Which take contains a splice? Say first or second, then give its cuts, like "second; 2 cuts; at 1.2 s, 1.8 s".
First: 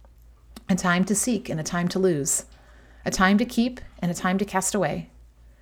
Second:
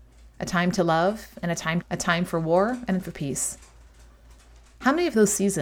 second; 2 cuts; at 1.8 s, 3.0 s